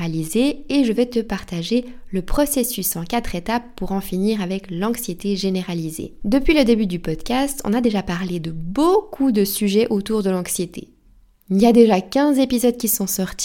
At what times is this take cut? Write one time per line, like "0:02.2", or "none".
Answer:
none